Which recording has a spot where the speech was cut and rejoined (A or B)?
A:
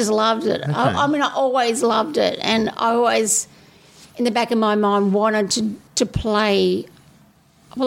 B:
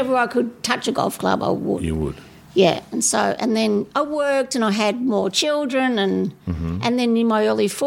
A